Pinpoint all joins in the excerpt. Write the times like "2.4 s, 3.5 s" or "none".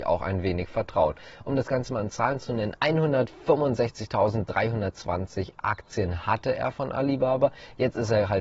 none